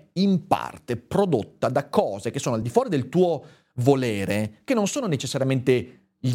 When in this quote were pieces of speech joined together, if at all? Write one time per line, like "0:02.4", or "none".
none